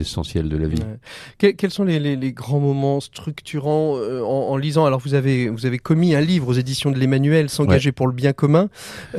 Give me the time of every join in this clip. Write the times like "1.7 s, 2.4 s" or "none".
none